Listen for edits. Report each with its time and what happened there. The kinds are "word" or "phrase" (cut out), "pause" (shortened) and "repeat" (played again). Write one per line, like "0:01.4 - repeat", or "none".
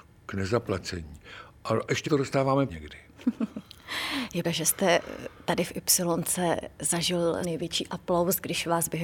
0:02.0 - word
0:02.7 - word
0:04.4 - word
0:07.4 - word